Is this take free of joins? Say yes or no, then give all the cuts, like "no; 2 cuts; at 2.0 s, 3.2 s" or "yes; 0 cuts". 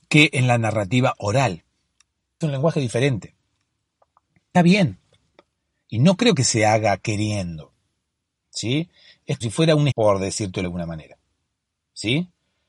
no; 5 cuts; at 2.4 s, 4.5 s, 9.4 s, 9.9 s, 10.6 s